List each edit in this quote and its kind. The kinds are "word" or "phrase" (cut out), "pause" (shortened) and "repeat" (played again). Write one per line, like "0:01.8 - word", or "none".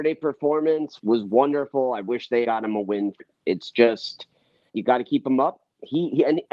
0:01.0 - word
0:02.4 - word
0:03.2 - word
0:04.7 - word